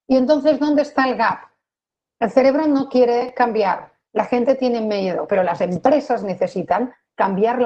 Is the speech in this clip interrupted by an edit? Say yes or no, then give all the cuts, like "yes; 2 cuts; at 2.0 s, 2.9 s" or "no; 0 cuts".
no; 0 cuts